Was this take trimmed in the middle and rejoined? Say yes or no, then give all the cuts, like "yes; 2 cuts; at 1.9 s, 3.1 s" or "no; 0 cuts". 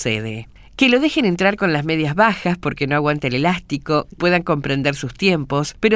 yes; 1 cut; at 4.2 s